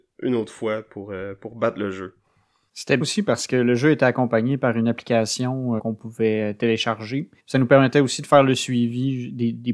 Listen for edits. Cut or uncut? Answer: cut